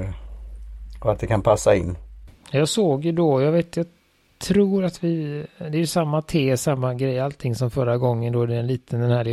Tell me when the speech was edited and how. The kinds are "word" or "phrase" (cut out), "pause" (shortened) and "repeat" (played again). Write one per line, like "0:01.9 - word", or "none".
none